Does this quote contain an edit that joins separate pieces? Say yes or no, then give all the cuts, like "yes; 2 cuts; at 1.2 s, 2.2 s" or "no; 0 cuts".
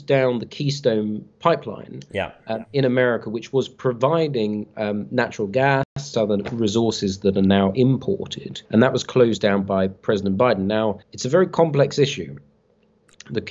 yes; 3 cuts; at 6.1 s, 8.7 s, 11.0 s